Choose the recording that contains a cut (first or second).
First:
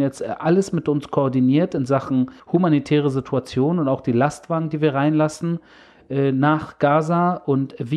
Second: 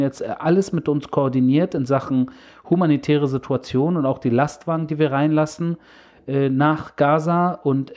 first